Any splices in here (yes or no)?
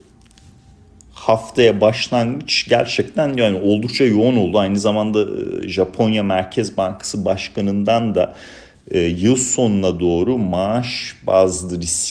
yes